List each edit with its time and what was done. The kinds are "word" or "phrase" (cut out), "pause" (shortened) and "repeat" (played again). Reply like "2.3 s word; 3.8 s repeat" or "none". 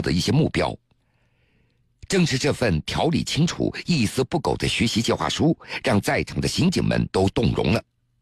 7.1 s pause